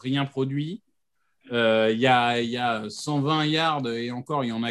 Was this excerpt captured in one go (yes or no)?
yes